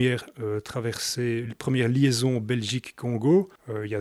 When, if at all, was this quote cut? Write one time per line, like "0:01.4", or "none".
none